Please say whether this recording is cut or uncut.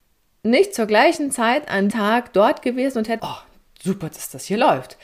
cut